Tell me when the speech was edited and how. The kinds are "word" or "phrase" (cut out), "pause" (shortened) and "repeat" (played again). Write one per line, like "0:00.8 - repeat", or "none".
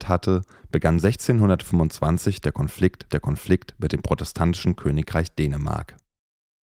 0:03.1 - repeat